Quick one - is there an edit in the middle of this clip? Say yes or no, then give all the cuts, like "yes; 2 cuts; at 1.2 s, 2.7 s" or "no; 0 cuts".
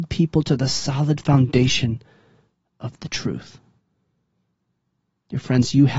no; 0 cuts